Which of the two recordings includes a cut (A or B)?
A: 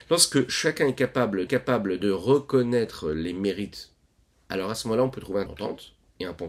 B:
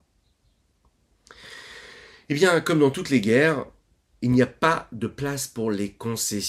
A